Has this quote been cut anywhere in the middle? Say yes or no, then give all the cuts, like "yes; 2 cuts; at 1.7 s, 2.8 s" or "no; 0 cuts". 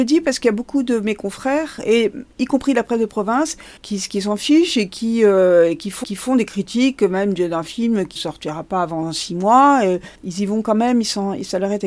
yes; 4 cuts; at 3.8 s, 6.0 s, 8.2 s, 10.2 s